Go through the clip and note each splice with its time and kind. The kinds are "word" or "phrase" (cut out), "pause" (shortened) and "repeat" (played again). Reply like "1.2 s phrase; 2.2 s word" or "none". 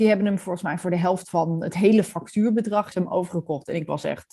2.9 s word